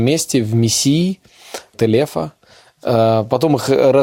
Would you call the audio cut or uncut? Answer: cut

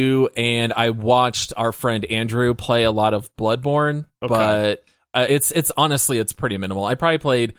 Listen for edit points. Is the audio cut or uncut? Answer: uncut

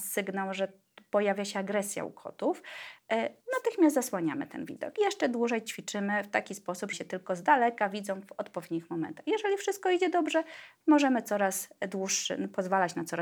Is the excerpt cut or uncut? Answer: cut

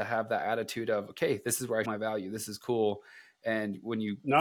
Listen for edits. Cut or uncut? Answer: cut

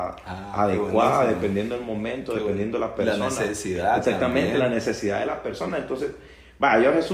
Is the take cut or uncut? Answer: uncut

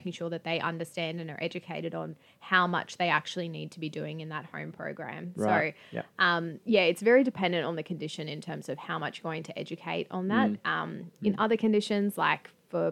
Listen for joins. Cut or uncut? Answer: uncut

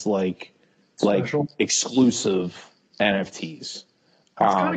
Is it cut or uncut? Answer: uncut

